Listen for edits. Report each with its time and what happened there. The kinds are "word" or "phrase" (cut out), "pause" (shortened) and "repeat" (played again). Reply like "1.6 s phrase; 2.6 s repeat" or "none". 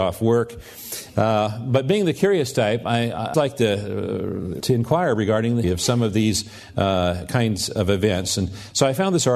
3.3 s word; 4.6 s word; 5.6 s word